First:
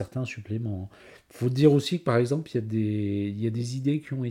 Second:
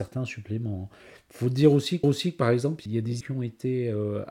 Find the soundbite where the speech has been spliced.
second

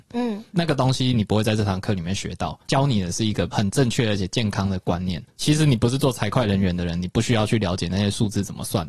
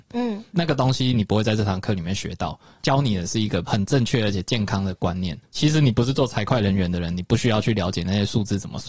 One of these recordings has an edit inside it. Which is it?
first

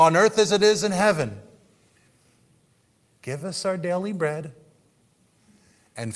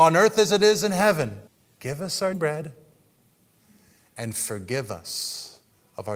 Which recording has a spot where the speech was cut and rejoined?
second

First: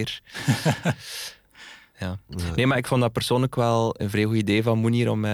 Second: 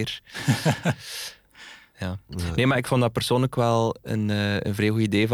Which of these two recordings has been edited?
first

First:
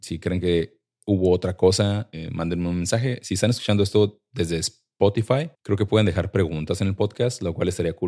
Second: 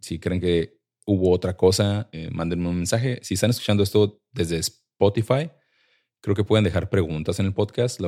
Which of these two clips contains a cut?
first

